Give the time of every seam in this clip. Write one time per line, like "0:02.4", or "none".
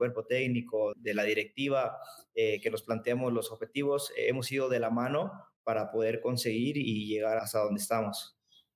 0:00.9
0:07.4